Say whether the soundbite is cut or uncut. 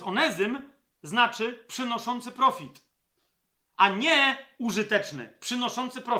uncut